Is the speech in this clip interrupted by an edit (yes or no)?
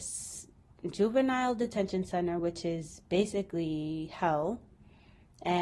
no